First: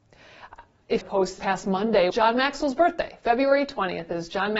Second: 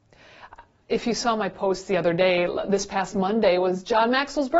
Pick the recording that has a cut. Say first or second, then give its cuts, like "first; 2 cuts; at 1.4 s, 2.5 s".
first; 3 cuts; at 1.0 s, 1.4 s, 2.1 s